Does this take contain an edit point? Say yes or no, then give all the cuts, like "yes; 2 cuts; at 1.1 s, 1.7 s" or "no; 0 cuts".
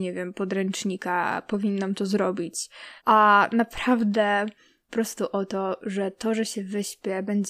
yes; 2 cuts; at 3.0 s, 4.9 s